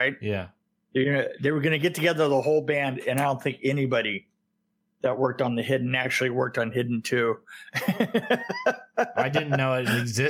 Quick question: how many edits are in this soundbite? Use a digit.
0